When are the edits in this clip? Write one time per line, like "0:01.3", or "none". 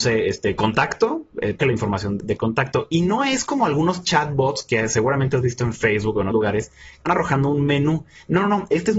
0:01.6
0:06.3
0:07.1